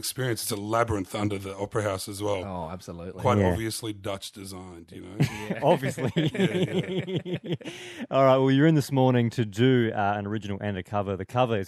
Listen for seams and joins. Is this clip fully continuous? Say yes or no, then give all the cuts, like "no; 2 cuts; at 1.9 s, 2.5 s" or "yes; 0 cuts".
yes; 0 cuts